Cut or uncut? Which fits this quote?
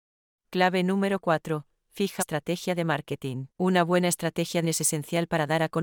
cut